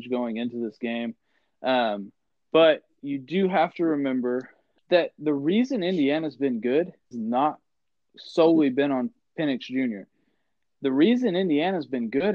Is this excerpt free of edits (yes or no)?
no